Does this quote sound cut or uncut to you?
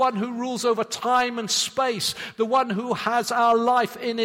uncut